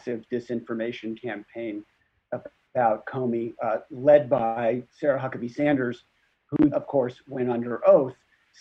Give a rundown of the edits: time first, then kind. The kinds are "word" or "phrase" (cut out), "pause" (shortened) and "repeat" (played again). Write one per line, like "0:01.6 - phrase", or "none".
0:04.9 - pause
0:06.7 - word